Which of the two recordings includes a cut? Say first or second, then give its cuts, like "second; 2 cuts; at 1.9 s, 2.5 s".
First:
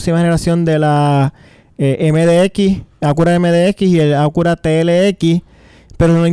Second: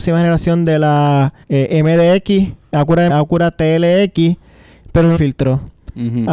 second; 3 cuts; at 1.4 s, 3.1 s, 5.2 s